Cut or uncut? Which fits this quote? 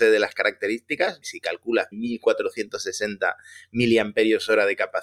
cut